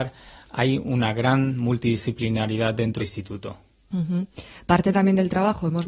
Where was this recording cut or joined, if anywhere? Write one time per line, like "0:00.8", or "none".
0:03.0